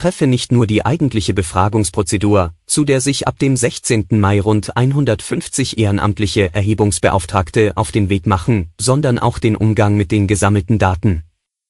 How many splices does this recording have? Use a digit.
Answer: 0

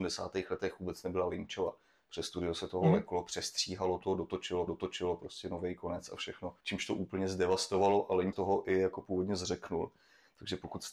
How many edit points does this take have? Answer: 3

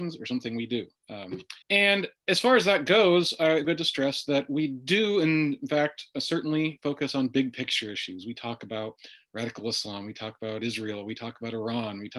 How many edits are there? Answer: 2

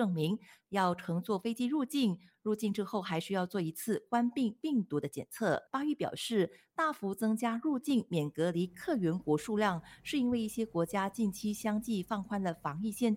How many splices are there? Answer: 1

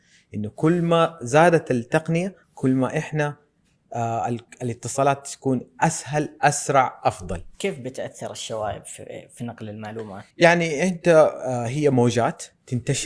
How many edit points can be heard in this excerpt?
3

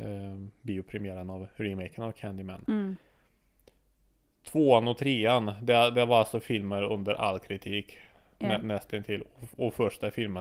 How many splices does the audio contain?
0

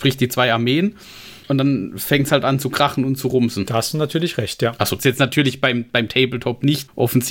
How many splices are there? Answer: 1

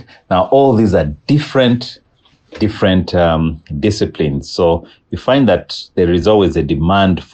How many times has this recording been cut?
0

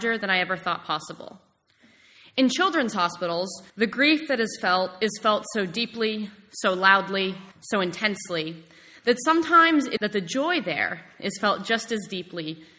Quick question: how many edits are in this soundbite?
3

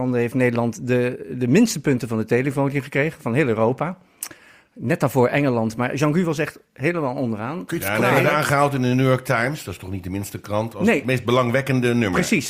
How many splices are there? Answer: 0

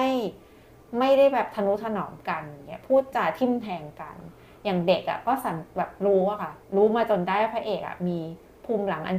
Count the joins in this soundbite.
1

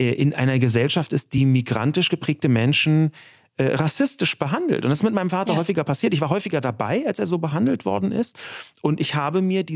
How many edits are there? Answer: 0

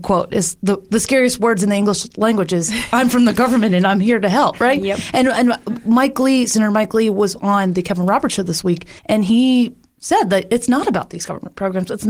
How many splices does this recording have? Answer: 1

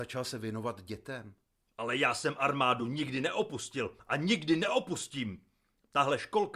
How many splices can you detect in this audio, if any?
0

